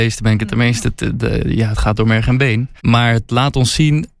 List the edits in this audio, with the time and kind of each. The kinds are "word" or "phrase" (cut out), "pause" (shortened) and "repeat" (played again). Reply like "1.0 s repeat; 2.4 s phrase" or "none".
2.8 s pause